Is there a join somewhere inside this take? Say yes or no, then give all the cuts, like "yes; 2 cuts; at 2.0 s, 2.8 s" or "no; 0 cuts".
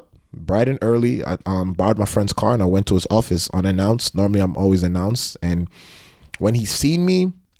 no; 0 cuts